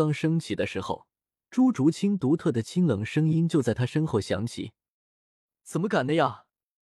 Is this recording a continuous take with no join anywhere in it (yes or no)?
yes